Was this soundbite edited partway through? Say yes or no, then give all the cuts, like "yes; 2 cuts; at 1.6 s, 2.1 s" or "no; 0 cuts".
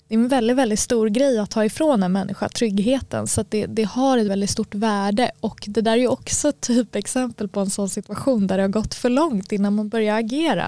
yes; 1 cut; at 4.3 s